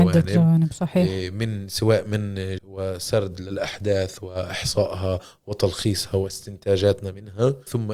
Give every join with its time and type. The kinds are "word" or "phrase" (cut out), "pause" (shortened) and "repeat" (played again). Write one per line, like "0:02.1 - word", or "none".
0:02.6 - word